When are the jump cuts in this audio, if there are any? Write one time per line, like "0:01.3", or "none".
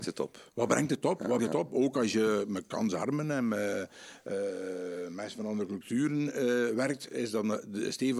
0:01.4